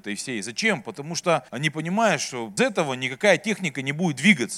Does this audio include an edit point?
yes; 2 cuts; at 1.5 s, 2.6 s

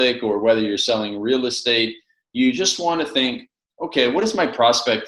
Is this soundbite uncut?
yes; 0 cuts

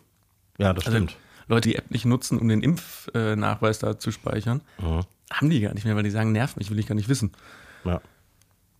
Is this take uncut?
no; 2 cuts; at 1.6 s, 4.7 s

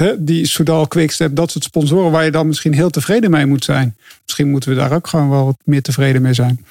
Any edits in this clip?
no; 0 cuts

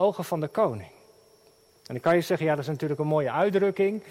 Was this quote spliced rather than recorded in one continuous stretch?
no; 0 cuts

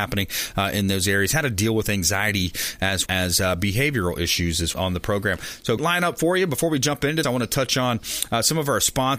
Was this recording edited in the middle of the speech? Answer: yes; 4 cuts; at 3.1 s, 4.7 s, 5.8 s, 7.2 s

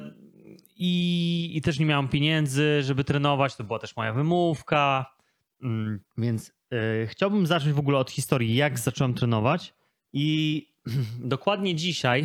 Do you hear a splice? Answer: yes; 2 cuts; at 6.1 s, 9.9 s

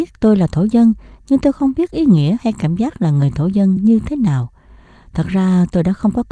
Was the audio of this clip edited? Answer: no; 0 cuts

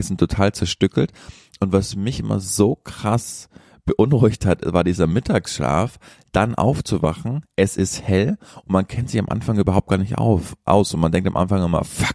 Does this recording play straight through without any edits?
yes; 0 cuts

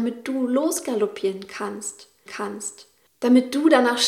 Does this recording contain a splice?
yes; 1 cut; at 2.3 s

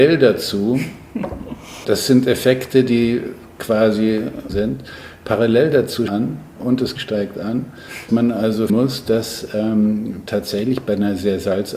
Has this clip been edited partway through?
yes; 6 cuts; at 1.8 s, 4.5 s, 6.1 s, 7.0 s, 8.1 s, 8.7 s

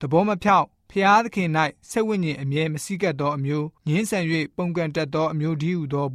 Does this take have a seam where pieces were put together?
yes; 1 cut; at 3.8 s

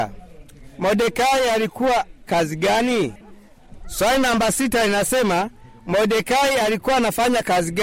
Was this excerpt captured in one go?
no; 1 cut; at 2.3 s

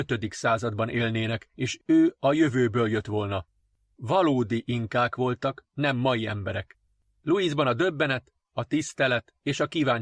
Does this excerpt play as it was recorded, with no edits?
yes; 0 cuts

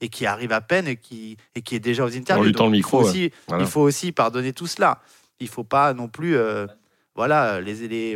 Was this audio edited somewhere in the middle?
no; 0 cuts

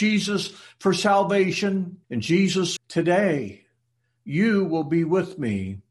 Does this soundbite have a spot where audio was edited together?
yes; 2 cuts; at 2.0 s, 2.8 s

